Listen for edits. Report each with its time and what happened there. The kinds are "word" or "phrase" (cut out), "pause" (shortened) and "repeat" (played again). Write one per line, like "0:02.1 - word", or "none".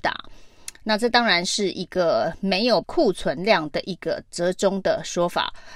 0:02.8 - word